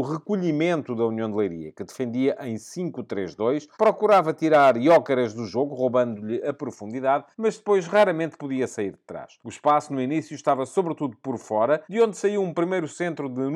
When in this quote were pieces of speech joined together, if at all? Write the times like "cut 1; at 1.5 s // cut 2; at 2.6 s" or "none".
cut 1; at 3.7 s // cut 2; at 7.3 s // cut 3; at 9.4 s // cut 4; at 11.8 s